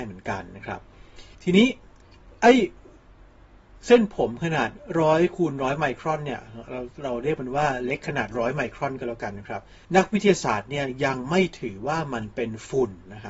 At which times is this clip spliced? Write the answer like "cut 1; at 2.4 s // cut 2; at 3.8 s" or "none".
cut 1; at 1.3 s // cut 2; at 9.8 s